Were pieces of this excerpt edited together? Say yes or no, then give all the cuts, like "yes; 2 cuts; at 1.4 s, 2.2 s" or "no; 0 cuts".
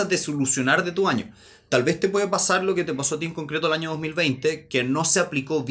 no; 0 cuts